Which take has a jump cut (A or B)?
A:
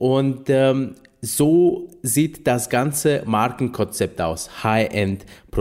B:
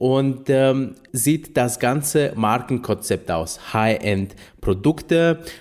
B